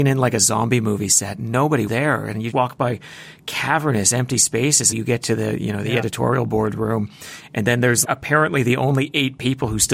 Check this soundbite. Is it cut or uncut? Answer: cut